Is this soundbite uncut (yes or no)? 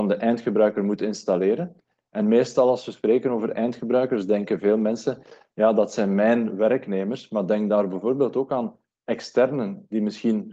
yes